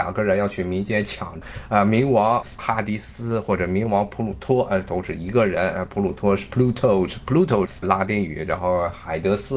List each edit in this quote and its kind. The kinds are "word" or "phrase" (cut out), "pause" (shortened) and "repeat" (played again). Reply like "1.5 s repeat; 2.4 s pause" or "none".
7.7 s word